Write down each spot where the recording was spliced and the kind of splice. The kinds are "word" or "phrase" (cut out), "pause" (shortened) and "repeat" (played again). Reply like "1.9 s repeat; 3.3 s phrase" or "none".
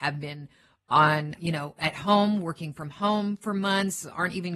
1.4 s word